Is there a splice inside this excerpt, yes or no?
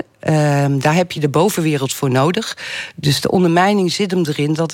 no